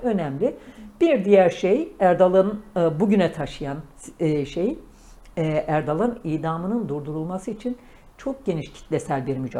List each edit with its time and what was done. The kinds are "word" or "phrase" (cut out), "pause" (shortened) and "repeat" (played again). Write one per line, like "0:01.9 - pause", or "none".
none

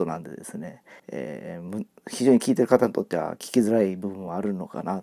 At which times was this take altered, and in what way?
0:01.0 - pause

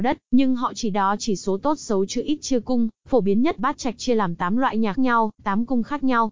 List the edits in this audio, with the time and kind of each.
0:03.0 - pause
0:03.6 - word
0:04.9 - word

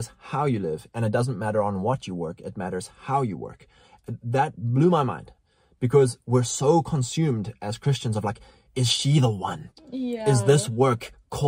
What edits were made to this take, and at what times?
none

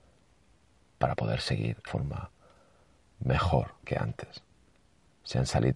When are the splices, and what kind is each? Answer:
0:01.9 - phrase
0:03.8 - pause

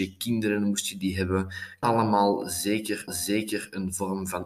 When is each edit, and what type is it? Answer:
0:01.8 - word
0:03.1 - repeat

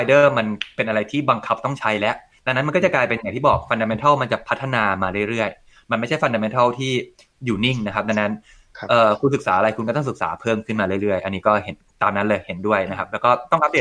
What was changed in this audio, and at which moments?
none

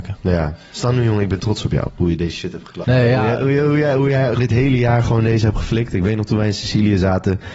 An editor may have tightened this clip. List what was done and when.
0:04.4 - word

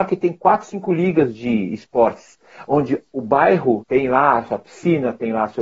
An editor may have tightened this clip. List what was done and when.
0:03.8 - word

